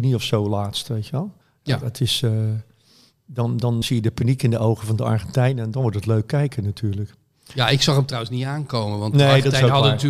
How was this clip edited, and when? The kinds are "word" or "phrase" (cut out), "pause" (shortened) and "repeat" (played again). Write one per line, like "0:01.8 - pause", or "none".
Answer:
0:01.4 - pause
0:03.8 - word